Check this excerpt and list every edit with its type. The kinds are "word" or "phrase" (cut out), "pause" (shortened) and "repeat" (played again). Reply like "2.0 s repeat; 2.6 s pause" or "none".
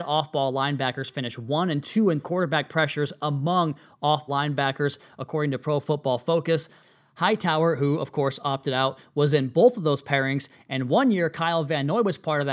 1.8 s phrase; 2.2 s phrase; 4.3 s word